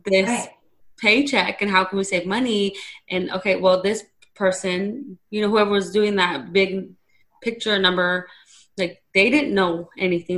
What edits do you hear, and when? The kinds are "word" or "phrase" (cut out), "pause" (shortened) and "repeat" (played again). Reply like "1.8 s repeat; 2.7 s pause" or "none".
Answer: none